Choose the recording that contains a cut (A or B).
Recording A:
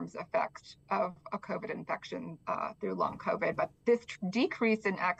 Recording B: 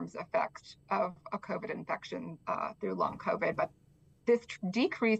A